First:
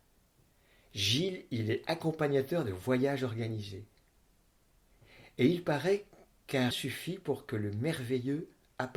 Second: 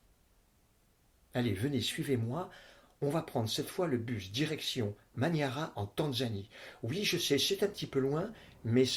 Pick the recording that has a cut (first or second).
first